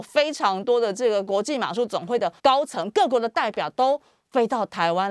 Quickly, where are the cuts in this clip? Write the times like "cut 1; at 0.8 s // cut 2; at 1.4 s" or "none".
cut 1; at 2.4 s